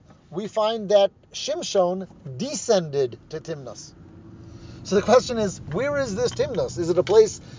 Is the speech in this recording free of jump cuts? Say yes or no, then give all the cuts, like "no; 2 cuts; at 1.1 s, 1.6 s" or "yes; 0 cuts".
yes; 0 cuts